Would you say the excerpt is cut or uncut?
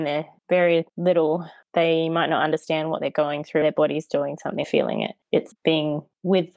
cut